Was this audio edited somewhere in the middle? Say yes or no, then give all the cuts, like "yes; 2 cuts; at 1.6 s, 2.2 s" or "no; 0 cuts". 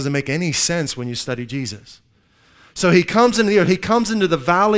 no; 0 cuts